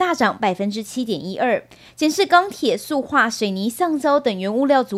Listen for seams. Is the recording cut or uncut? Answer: uncut